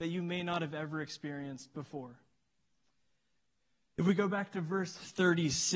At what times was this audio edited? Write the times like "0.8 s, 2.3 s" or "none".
none